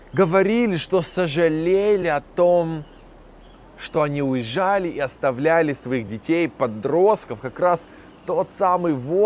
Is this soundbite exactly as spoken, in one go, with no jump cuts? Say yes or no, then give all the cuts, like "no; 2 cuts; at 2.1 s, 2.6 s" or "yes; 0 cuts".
yes; 0 cuts